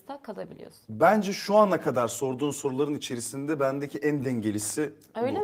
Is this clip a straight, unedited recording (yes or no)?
yes